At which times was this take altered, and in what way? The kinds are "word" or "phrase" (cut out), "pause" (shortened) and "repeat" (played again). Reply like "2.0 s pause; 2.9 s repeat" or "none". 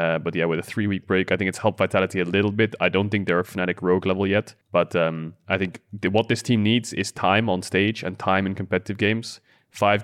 4.6 s pause